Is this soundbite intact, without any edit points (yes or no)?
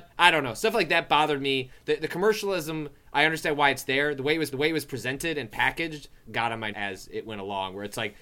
no